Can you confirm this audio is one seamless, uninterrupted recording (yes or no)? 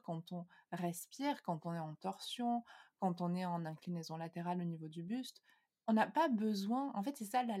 yes